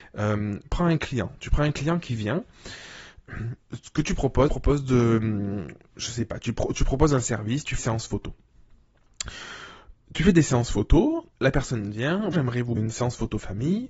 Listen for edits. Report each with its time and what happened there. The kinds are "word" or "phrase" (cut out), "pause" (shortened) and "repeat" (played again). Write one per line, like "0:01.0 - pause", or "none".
0:04.5 - phrase
0:07.8 - word
0:11.3 - pause
0:12.3 - word
0:12.8 - word